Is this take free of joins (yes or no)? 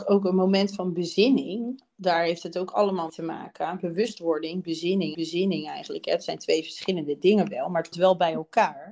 no